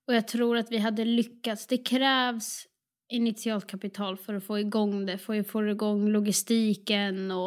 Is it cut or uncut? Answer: uncut